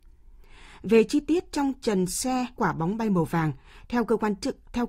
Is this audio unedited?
no; 1 cut; at 2.6 s

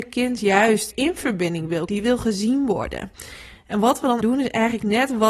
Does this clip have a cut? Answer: yes; 3 cuts; at 0.9 s, 1.9 s, 4.2 s

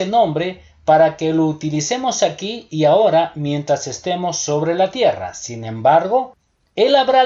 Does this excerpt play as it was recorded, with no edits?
yes; 0 cuts

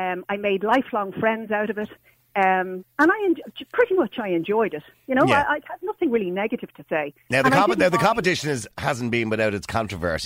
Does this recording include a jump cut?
no; 0 cuts

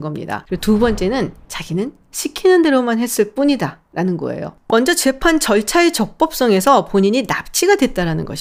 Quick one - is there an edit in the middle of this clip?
no; 0 cuts

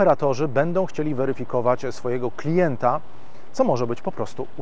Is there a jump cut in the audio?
no; 0 cuts

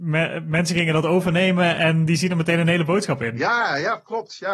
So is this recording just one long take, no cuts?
yes; 0 cuts

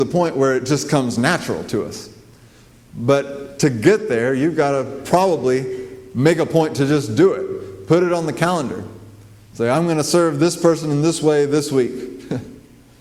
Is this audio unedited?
yes; 0 cuts

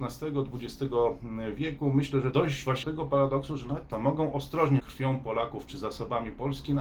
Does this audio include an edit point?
yes; 4 cuts; at 2.3 s, 2.8 s, 3.9 s, 4.8 s

